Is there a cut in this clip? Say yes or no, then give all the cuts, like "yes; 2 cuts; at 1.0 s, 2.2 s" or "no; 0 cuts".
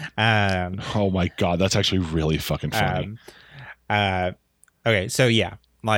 no; 0 cuts